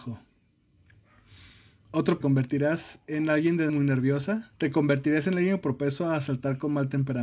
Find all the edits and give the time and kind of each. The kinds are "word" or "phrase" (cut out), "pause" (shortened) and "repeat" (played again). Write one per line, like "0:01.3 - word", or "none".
0:02.2 - phrase
0:03.7 - word
0:04.6 - pause